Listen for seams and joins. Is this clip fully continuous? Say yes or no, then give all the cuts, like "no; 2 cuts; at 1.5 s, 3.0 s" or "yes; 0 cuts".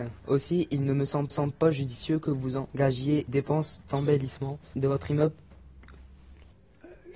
no; 2 cuts; at 1.3 s, 3.3 s